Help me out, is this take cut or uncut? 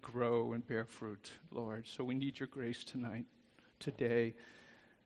uncut